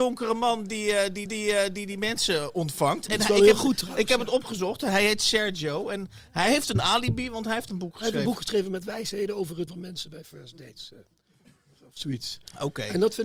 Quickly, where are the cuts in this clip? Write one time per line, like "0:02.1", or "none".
0:01.3
0:03.1
0:07.7
0:09.7